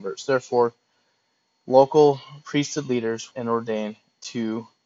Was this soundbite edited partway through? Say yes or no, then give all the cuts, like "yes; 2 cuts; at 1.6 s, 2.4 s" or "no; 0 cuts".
yes; 1 cut; at 3.3 s